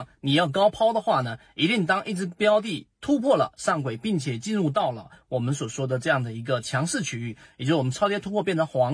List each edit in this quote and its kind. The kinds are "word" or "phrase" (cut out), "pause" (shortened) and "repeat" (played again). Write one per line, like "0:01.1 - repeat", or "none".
0:02.9 - pause